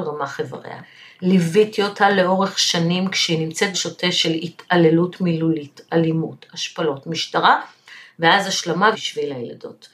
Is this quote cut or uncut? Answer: cut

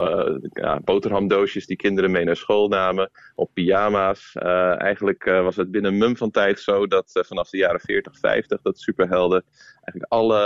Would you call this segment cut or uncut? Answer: uncut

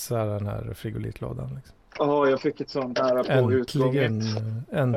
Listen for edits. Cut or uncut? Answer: cut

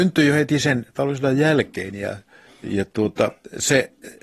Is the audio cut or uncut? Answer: cut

